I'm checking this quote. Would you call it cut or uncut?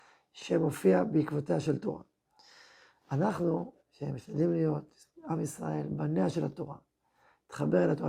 cut